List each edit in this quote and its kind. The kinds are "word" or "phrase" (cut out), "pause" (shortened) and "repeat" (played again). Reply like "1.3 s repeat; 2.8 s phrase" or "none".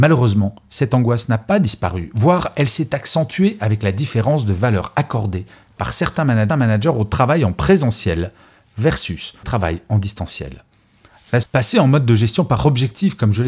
6.5 s repeat; 9.4 s word; 11.4 s word